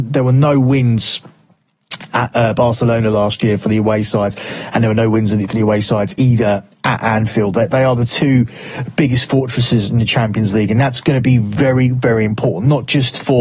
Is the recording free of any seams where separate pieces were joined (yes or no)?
yes